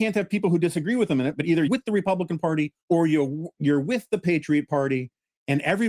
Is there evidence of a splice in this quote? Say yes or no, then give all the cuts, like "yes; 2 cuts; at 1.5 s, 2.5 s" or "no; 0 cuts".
yes; 2 cuts; at 1.7 s, 2.8 s